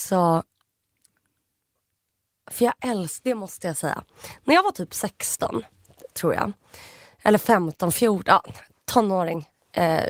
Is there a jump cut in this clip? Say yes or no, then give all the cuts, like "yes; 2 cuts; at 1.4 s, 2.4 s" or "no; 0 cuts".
no; 0 cuts